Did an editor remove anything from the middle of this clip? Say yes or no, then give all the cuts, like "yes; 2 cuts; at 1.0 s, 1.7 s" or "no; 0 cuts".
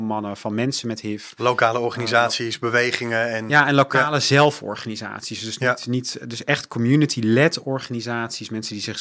no; 0 cuts